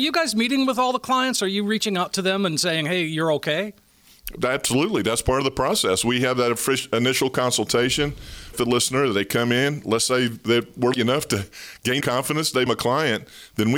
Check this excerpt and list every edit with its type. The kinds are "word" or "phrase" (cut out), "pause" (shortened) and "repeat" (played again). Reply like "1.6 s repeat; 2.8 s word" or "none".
8.5 s word; 10.9 s word; 12.0 s word; 12.7 s word